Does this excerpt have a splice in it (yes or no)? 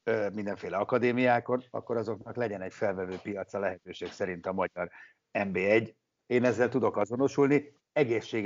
no